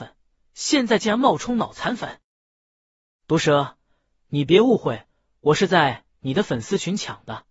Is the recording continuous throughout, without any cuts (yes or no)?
yes